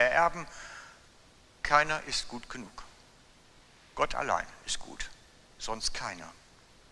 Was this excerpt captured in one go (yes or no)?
yes